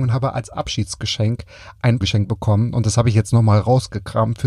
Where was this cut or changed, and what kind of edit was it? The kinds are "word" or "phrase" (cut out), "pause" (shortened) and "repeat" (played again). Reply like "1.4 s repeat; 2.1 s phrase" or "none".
2.0 s word